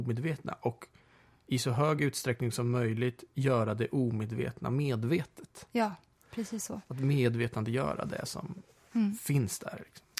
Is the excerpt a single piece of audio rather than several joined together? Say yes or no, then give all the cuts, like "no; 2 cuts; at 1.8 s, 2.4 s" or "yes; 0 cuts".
yes; 0 cuts